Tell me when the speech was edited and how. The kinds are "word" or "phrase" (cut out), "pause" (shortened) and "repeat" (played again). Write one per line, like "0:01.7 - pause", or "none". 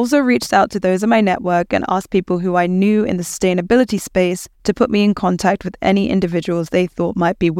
0:04.5 - pause